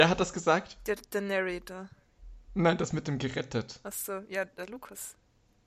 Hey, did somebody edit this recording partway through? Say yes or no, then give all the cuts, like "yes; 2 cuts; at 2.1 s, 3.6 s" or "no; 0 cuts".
yes; 1 cut; at 2.4 s